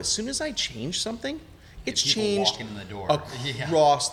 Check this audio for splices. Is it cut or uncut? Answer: uncut